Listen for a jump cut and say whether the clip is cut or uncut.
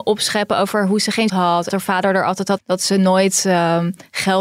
cut